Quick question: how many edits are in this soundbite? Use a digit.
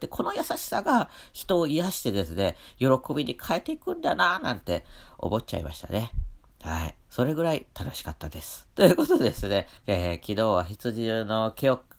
4